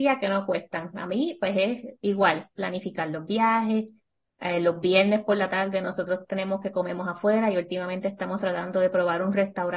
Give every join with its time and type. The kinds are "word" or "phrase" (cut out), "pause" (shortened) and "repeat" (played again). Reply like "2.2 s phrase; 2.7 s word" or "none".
none